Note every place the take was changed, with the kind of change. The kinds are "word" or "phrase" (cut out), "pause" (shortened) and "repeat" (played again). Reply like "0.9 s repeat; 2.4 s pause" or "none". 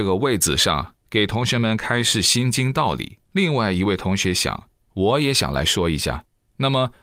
1.0 s pause; 3.2 s pause